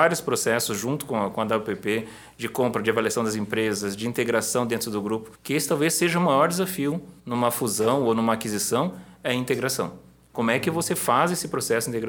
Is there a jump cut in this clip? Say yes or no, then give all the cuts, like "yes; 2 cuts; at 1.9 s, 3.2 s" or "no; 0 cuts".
yes; 2 cuts; at 5.3 s, 7.2 s